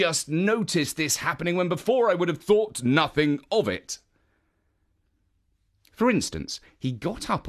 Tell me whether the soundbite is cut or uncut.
uncut